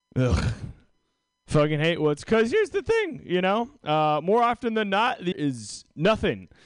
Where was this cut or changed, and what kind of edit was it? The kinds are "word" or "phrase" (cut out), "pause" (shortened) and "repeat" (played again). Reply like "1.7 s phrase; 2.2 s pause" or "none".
5.3 s word